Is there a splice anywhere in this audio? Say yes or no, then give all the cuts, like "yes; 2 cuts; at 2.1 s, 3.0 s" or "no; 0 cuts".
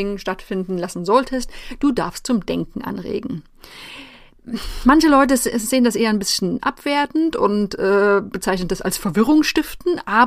no; 0 cuts